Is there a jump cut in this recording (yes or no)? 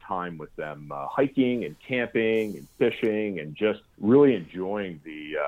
yes